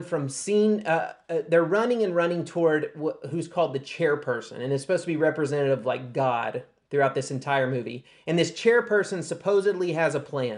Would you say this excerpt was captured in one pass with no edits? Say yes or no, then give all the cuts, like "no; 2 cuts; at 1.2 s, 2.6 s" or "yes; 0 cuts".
yes; 0 cuts